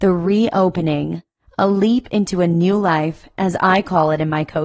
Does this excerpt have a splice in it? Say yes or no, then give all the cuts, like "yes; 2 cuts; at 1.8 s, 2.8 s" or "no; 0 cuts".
no; 0 cuts